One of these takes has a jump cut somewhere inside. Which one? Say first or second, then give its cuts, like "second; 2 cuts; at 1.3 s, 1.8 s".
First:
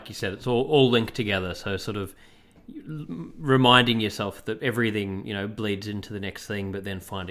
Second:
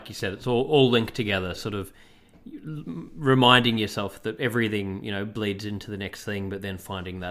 second; 1 cut; at 1.6 s